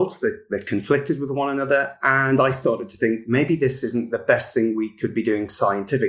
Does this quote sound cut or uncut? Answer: uncut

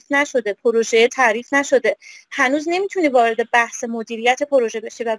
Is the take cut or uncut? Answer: uncut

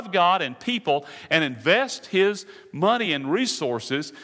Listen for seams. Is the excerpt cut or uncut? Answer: uncut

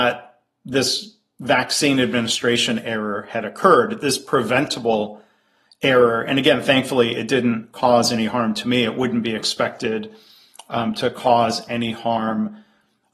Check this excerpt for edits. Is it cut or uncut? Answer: uncut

